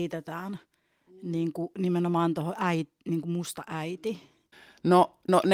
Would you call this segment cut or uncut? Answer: uncut